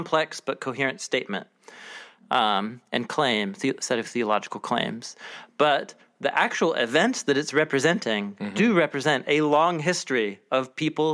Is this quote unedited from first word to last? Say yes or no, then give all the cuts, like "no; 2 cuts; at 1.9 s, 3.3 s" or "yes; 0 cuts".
yes; 0 cuts